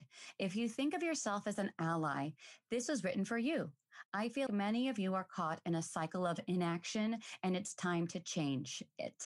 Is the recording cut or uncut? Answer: cut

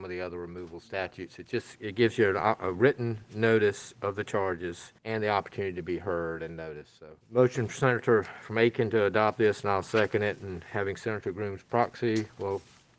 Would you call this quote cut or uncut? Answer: cut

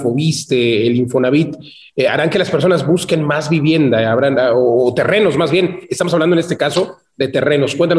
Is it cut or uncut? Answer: uncut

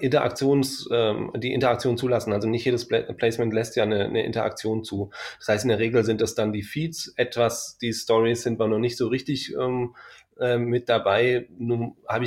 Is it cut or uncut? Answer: uncut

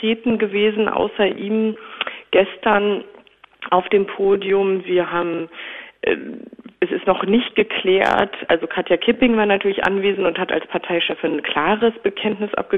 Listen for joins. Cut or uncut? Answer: uncut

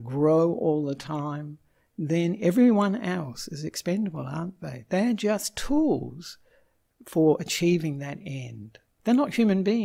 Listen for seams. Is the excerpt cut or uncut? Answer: uncut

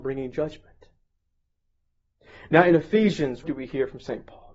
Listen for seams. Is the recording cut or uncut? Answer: cut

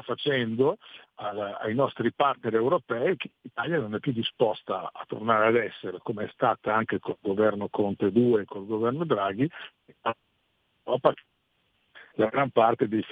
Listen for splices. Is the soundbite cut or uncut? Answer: uncut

